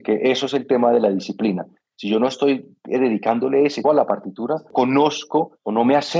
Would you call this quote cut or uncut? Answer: cut